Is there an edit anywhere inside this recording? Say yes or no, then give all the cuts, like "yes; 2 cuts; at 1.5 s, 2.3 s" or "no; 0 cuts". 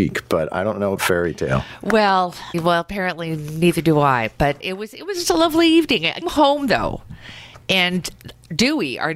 yes; 5 cuts; at 1.0 s, 2.5 s, 4.6 s, 5.2 s, 6.2 s